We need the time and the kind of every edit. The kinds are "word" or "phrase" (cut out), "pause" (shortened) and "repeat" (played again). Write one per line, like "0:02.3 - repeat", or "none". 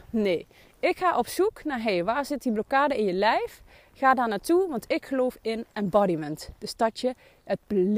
none